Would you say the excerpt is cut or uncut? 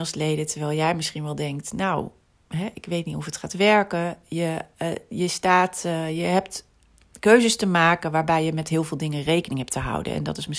uncut